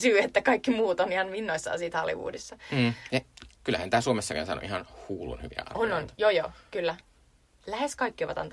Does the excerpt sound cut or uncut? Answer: uncut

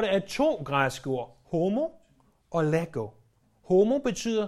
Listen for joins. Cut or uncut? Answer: uncut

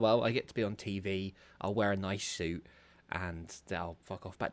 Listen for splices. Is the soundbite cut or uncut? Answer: uncut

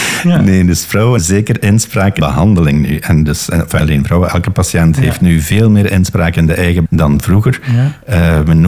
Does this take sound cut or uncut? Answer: cut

